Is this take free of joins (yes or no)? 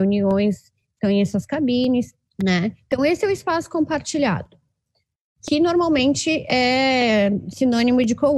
no